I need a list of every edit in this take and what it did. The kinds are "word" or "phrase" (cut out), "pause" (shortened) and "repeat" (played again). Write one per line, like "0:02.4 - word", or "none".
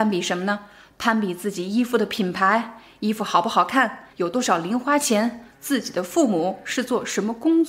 0:04.1 - pause
0:05.5 - pause